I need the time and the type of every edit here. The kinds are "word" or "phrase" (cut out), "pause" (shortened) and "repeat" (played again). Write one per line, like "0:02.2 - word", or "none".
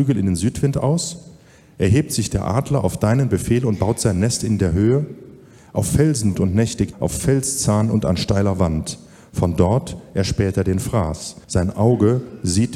0:06.3 - word
0:06.9 - word
0:11.4 - pause